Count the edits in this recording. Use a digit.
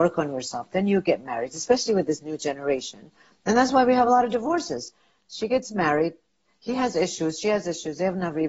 0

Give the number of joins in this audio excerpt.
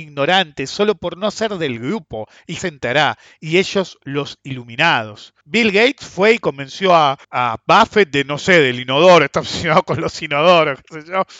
3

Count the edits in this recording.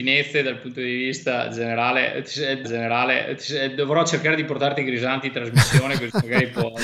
1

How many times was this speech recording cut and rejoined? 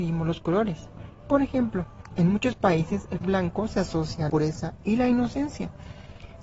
2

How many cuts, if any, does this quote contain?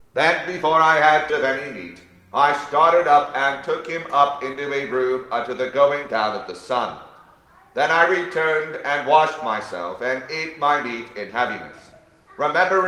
1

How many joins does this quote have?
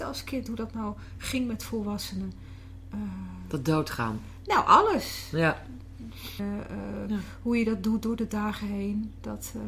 1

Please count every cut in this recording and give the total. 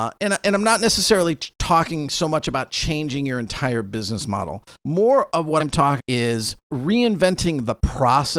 4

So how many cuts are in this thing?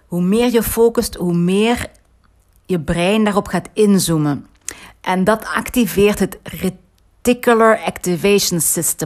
0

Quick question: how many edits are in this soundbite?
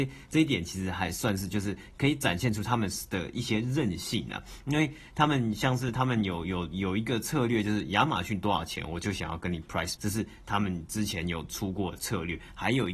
1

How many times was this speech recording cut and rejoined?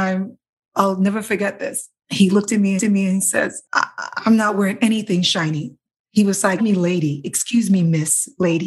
4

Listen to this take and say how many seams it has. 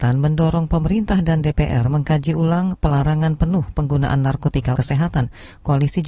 1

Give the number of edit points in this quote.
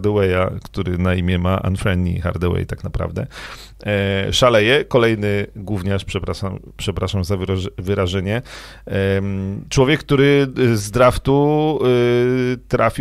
1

